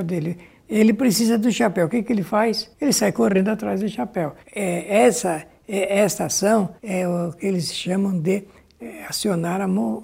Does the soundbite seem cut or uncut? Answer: cut